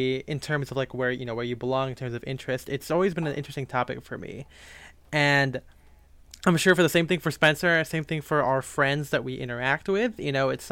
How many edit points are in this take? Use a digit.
0